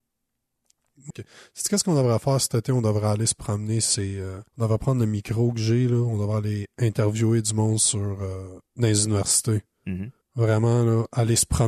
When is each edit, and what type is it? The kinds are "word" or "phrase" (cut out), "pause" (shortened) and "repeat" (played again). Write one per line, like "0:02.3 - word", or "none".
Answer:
0:01.1 - phrase
0:04.5 - pause
0:08.7 - pause
0:10.2 - pause